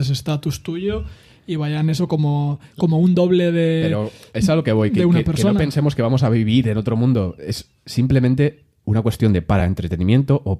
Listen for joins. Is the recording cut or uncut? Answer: uncut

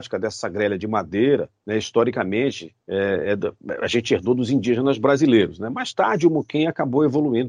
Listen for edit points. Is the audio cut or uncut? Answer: cut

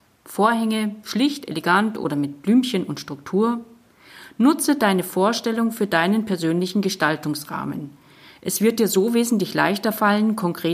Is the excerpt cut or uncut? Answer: uncut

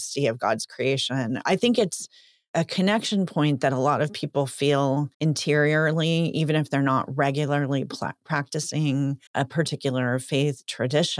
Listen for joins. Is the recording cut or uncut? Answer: cut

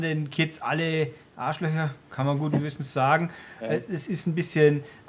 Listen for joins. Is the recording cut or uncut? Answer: uncut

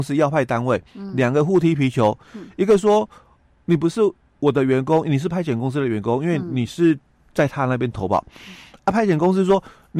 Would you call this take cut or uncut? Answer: uncut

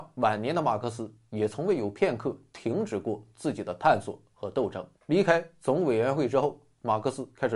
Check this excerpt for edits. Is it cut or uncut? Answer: cut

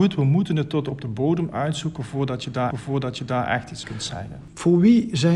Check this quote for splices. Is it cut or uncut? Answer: cut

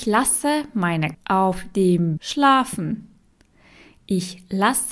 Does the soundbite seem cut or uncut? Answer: cut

